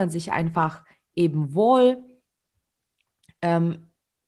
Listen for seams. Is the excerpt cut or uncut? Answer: uncut